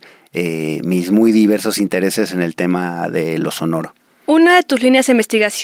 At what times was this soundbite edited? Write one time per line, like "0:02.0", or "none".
none